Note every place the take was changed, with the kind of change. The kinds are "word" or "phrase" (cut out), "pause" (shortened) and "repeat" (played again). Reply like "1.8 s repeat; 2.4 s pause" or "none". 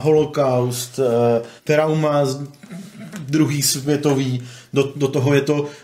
1.6 s pause